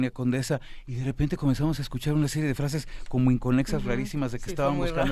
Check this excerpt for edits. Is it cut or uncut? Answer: uncut